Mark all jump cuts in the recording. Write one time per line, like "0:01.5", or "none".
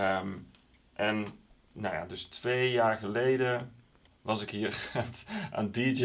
0:01.5